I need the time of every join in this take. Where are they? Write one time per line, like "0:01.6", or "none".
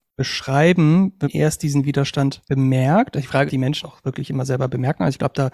0:01.2
0:02.5
0:03.5
0:03.8